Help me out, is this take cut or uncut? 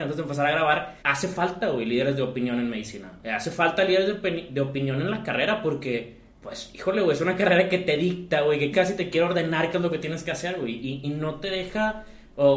cut